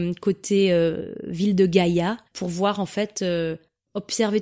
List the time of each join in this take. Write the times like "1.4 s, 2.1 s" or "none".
2.2 s